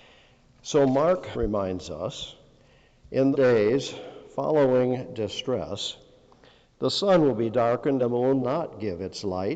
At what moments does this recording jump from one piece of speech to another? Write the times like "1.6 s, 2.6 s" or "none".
1.3 s, 3.3 s, 8.0 s, 8.4 s